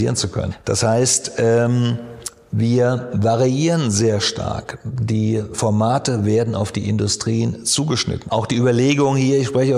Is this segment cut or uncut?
uncut